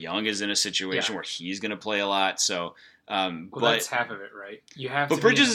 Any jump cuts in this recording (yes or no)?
no